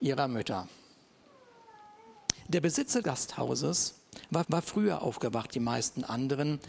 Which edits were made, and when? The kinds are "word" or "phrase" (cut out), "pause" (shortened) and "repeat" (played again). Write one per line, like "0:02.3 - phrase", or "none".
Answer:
0:03.0 - word
0:04.4 - repeat
0:05.5 - word